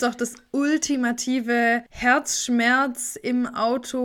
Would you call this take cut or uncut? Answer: cut